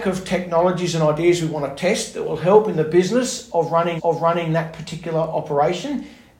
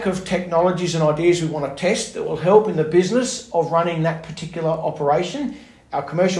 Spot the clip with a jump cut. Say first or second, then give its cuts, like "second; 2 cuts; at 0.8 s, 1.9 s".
first; 1 cut; at 4.0 s